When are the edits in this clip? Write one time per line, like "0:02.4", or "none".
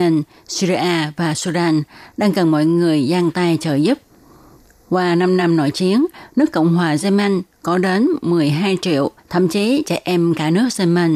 none